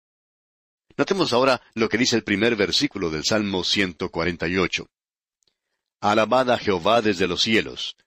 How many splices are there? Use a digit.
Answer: 0